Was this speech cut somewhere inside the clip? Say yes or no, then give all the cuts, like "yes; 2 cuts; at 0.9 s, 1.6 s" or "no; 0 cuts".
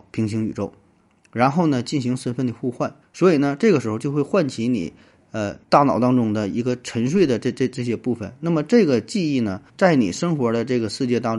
yes; 3 cuts; at 3.0 s, 5.6 s, 9.7 s